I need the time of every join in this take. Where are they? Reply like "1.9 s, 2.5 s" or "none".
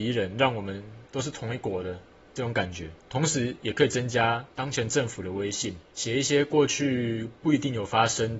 1.1 s